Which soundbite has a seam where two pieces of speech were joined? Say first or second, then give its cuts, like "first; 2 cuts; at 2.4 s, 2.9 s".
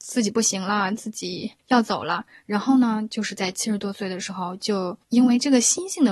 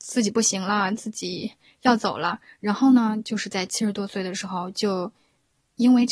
first; 2 cuts; at 1.6 s, 5.0 s